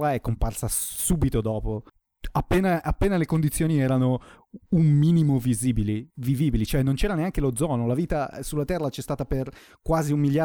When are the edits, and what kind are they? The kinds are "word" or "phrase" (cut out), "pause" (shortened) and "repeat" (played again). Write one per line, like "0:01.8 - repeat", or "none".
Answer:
none